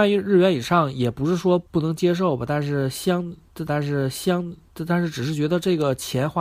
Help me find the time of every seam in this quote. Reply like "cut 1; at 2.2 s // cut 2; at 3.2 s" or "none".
cut 1; at 1.7 s // cut 2; at 3.7 s